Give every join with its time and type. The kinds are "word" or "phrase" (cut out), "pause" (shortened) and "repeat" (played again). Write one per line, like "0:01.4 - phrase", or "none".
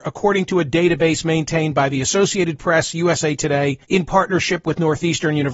0:03.8 - pause